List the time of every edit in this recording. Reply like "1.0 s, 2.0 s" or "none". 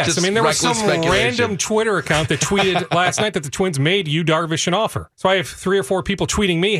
5.1 s